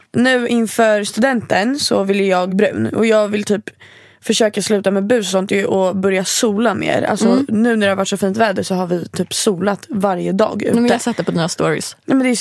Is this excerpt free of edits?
no; 1 cut; at 2.5 s

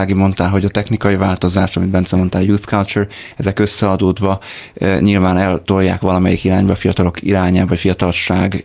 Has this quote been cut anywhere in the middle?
no; 0 cuts

